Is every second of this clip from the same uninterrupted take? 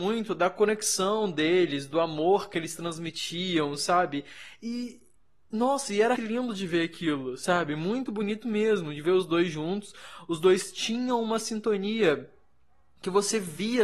no; 2 cuts; at 6.2 s, 8.1 s

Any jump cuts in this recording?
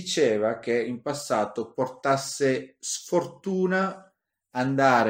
no; 0 cuts

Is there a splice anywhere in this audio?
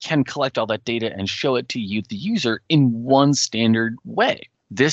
no; 0 cuts

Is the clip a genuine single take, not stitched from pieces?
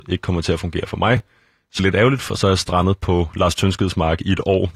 no; 1 cut; at 1.8 s

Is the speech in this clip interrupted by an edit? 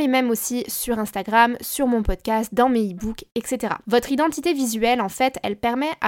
no; 0 cuts

